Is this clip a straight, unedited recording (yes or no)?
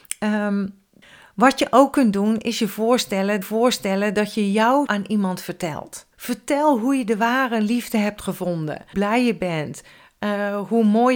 no